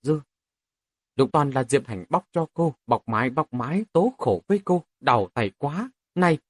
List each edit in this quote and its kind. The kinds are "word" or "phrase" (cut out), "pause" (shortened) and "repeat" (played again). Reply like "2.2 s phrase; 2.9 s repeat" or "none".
1.3 s word; 1.8 s word; 2.8 s pause; 3.9 s word; 4.9 s pause